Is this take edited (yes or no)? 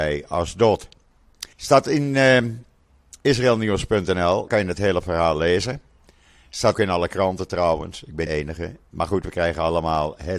yes